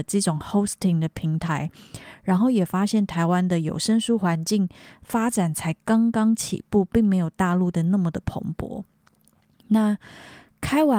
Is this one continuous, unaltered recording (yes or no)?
yes